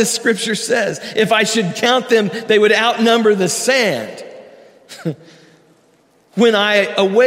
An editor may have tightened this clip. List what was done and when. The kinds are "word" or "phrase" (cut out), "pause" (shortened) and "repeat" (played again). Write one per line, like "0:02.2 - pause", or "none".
none

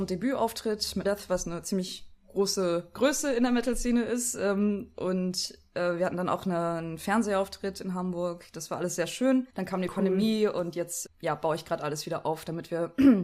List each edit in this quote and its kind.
0:01.0 - word
0:09.5 - pause
0:11.1 - word

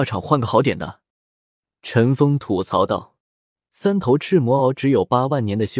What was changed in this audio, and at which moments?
0:01.1 - pause
0:03.2 - pause

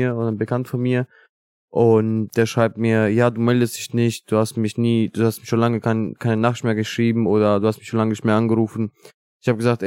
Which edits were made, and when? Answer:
none

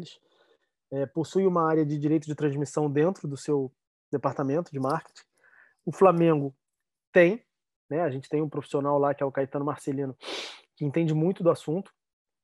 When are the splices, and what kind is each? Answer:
none

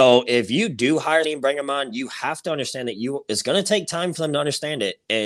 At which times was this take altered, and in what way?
0:01.2 - word

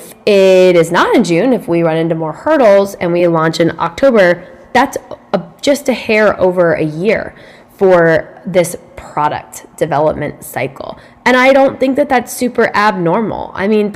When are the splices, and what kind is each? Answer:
none

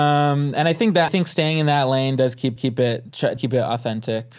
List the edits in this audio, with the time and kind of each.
0:01.1 - word
0:02.6 - repeat
0:03.4 - word

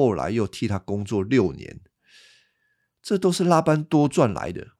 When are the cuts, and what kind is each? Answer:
none

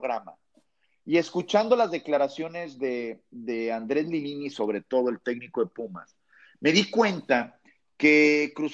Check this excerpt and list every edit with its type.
none

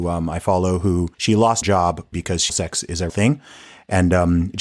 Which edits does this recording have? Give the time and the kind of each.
0:01.1 - pause
0:01.6 - word
0:02.1 - word
0:02.5 - phrase
0:03.1 - word

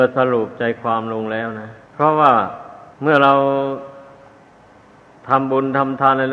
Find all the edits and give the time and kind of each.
0:01.8 - pause
0:02.9 - pause

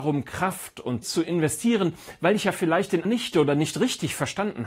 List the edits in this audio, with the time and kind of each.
0:01.0 - word
0:03.0 - word

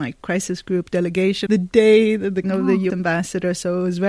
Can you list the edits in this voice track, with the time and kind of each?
0:01.5 - word
0:02.4 - word
0:02.9 - word

